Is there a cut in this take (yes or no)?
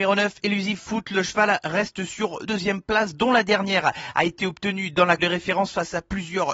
yes